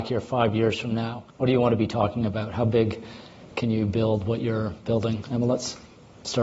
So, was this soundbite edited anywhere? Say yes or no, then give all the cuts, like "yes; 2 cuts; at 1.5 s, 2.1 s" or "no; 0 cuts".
yes; 1 cut; at 1.3 s